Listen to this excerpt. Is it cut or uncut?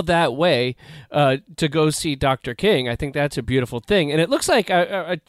uncut